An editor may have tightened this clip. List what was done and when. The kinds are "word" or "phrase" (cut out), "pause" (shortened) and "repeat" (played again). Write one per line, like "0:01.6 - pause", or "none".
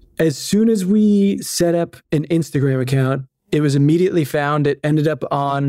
0:02.0 - pause